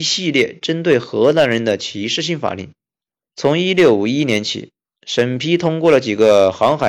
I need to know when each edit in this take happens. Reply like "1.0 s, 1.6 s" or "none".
none